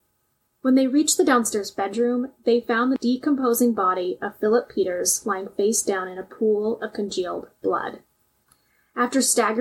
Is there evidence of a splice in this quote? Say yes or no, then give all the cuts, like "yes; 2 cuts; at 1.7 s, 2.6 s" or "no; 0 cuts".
no; 0 cuts